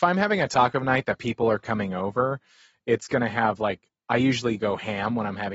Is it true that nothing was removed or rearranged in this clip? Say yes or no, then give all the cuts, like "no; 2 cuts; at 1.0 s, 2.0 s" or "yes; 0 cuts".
yes; 0 cuts